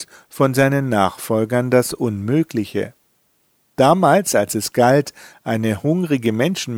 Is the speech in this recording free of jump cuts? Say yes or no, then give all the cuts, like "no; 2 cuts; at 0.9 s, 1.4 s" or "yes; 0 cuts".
yes; 0 cuts